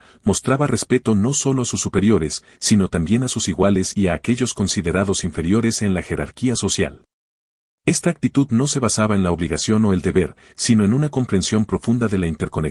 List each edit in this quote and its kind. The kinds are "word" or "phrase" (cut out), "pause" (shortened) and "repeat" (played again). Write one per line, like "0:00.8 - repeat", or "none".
none